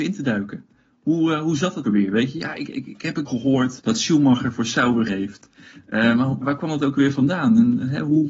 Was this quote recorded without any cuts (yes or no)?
no